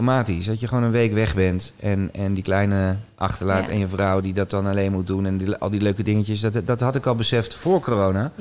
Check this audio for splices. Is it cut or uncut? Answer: uncut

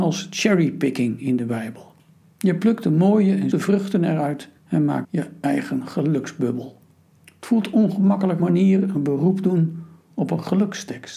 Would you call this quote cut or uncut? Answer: cut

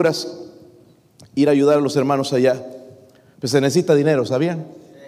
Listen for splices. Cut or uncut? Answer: uncut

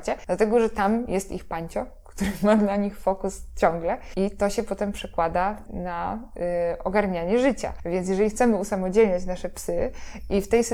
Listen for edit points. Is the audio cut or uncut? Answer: uncut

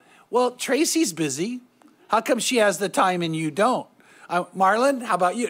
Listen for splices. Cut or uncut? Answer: uncut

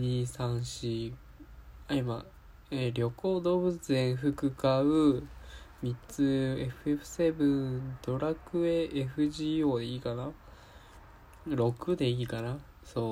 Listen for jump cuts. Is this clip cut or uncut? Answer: uncut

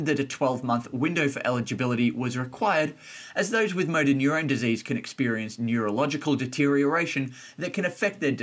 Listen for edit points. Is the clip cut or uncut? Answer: uncut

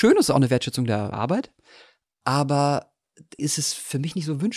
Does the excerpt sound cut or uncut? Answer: cut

